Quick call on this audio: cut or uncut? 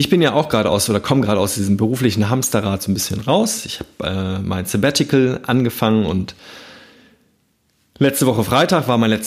uncut